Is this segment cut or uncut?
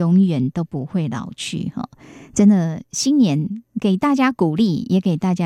uncut